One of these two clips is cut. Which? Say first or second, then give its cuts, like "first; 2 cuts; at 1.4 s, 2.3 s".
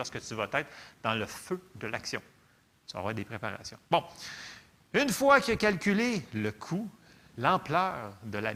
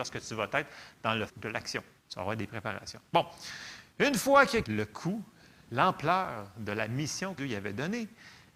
second; 5 cuts; at 1.3 s, 2.0 s, 3.9 s, 4.6 s, 7.4 s